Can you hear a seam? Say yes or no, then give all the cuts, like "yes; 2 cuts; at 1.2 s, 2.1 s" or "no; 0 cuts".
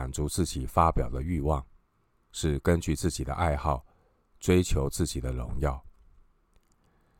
no; 0 cuts